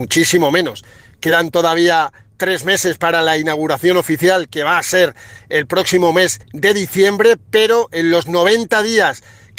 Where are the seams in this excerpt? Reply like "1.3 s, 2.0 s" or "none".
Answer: 6.4 s